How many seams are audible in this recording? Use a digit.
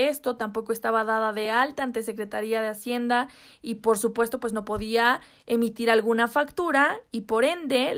0